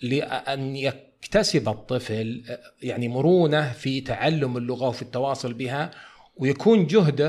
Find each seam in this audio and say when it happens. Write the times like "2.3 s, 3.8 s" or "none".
none